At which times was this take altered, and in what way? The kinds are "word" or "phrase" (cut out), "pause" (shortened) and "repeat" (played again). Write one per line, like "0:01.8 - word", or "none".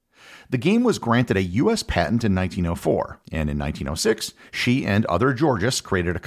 0:03.2 - pause